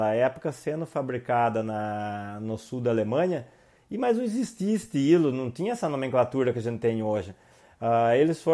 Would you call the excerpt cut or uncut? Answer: uncut